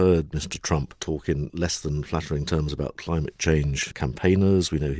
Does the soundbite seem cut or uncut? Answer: uncut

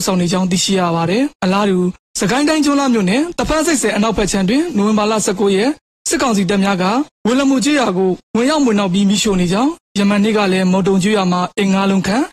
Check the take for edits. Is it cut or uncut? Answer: cut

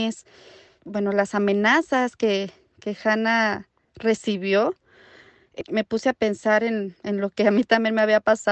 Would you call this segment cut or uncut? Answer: uncut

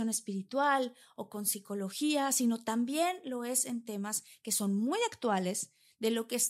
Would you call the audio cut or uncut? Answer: uncut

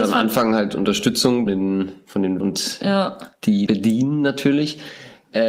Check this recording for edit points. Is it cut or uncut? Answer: cut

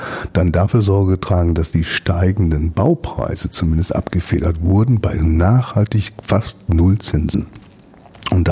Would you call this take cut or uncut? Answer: uncut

